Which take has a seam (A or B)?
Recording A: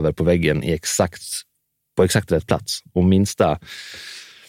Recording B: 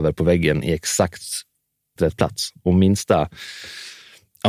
B